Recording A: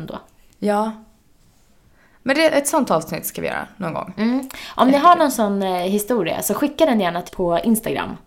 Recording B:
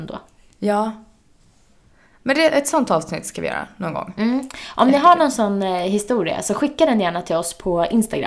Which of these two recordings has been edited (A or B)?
A